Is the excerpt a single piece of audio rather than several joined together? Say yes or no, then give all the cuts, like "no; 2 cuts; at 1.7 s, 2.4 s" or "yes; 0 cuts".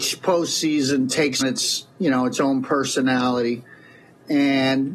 no; 1 cut; at 1.4 s